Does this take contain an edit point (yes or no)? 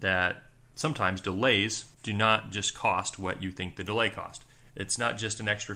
yes